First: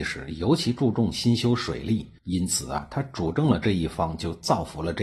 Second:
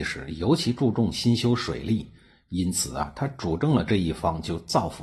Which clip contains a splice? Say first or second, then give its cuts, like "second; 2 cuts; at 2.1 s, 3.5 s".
first; 1 cut; at 2.2 s